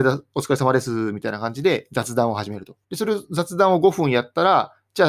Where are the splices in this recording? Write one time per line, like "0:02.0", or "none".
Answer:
0:02.8

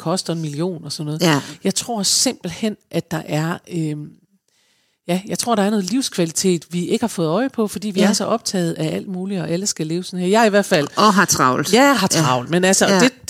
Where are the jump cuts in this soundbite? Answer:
none

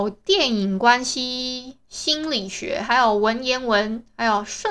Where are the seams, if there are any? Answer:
0:01.8

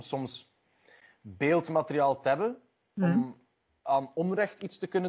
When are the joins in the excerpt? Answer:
none

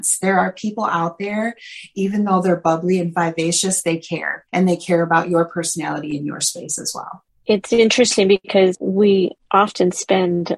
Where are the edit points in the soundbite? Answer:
0:04.5

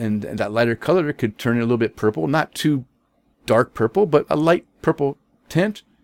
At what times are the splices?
none

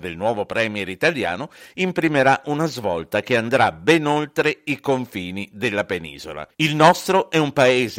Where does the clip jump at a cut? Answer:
0:06.5

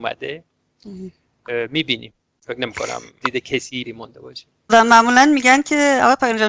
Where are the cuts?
0:03.2
0:03.8
0:04.7

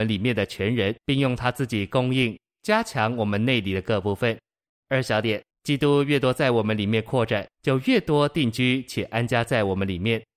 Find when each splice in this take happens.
0:01.0
0:04.7
0:05.5
0:07.5

